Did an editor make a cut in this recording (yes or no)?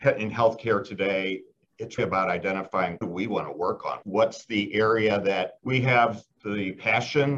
yes